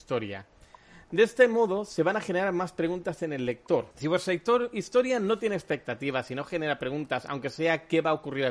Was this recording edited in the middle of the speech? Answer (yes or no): yes